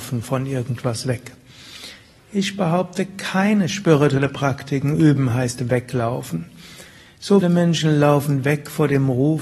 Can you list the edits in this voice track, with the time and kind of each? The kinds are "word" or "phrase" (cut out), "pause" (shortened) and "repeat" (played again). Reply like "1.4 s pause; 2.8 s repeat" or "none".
7.4 s word